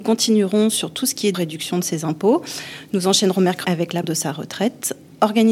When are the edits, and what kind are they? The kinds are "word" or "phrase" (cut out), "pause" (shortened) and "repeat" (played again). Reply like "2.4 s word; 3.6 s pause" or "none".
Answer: 1.3 s word; 3.6 s word; 4.0 s word